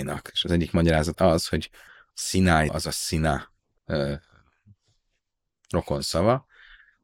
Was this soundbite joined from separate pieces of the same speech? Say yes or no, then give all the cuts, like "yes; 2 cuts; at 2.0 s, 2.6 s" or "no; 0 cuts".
yes; 4 cuts; at 1.1 s, 2.1 s, 2.7 s, 3.8 s